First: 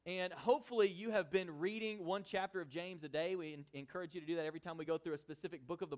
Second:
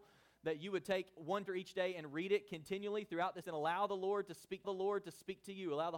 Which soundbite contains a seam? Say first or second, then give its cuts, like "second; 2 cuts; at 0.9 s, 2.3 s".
second; 3 cuts; at 1.5 s, 3.4 s, 4.6 s